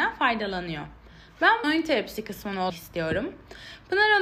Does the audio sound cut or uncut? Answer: cut